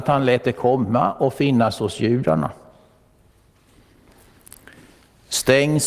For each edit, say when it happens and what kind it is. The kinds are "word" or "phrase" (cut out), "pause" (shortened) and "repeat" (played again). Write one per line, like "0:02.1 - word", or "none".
none